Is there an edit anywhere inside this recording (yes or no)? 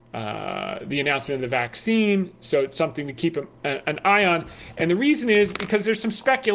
no